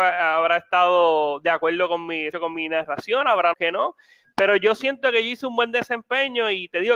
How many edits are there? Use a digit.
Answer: 2